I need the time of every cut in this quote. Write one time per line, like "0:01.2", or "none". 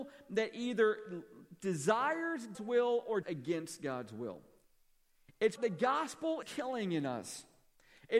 0:02.5
0:03.2
0:05.6
0:06.4